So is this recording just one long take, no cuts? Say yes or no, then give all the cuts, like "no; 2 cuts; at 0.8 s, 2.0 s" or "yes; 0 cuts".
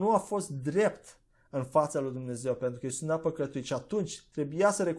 yes; 0 cuts